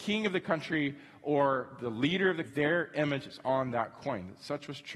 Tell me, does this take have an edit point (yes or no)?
yes